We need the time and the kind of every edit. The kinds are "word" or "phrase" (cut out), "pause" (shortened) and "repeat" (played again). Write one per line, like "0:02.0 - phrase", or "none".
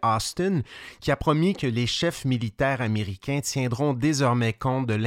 none